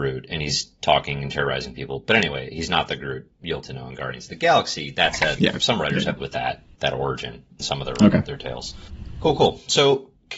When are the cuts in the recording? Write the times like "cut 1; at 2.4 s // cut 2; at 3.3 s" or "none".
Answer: cut 1; at 3.6 s // cut 2; at 5.4 s // cut 3; at 6.2 s // cut 4; at 7.6 s